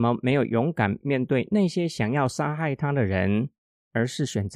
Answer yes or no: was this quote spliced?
no